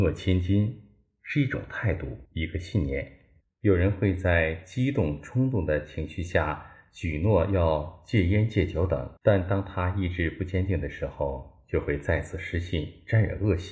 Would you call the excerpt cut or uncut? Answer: cut